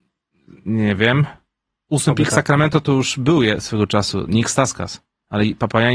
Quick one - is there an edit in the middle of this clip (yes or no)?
no